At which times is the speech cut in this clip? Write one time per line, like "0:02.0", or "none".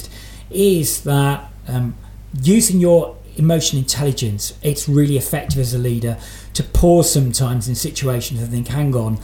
none